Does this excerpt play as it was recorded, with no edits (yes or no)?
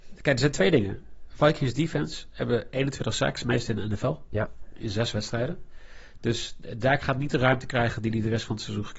yes